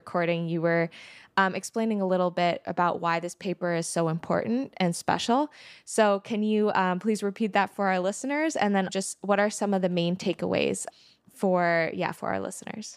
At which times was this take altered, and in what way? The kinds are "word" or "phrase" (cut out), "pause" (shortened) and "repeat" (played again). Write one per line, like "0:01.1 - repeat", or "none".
0:04.9 - word
0:08.9 - word